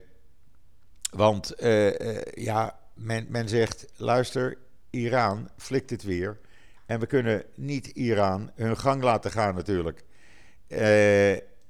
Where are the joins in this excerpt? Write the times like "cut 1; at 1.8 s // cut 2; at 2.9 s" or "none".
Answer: none